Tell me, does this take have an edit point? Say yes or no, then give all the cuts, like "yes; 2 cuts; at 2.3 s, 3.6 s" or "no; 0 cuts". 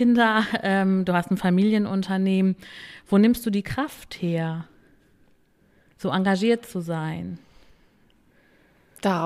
no; 0 cuts